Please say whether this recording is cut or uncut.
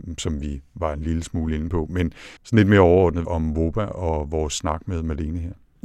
cut